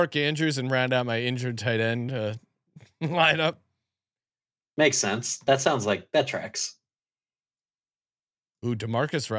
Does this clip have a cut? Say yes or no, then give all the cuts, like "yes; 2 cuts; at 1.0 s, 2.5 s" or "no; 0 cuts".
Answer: no; 0 cuts